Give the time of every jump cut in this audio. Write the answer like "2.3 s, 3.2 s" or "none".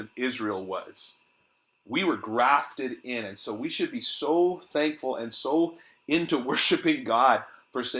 none